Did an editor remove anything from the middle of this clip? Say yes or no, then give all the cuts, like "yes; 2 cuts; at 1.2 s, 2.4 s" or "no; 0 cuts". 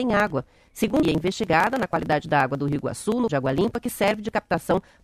yes; 2 cuts; at 1.0 s, 3.3 s